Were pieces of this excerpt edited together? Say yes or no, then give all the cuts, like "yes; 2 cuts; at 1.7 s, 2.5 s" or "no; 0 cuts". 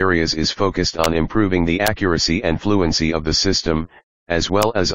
no; 0 cuts